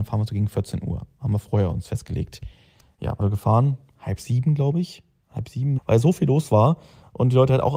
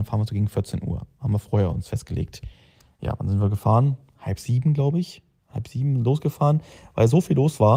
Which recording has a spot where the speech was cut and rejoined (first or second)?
first